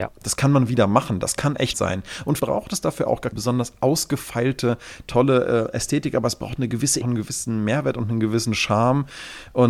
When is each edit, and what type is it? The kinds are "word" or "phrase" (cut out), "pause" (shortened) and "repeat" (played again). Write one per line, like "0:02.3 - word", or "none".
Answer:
0:01.7 - word
0:02.4 - word
0:03.3 - word
0:07.0 - phrase